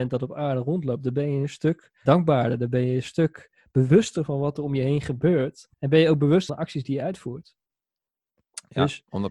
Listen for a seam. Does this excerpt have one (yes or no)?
yes